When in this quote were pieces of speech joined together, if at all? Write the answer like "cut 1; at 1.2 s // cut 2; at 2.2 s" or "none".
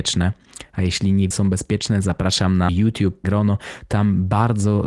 cut 1; at 1.3 s // cut 2; at 2.7 s // cut 3; at 3.2 s